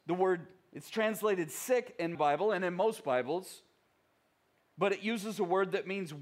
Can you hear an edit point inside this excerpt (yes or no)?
yes